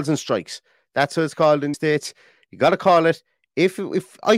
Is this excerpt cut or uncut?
cut